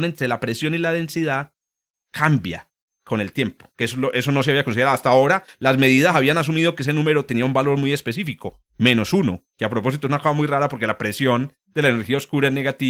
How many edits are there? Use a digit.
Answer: 0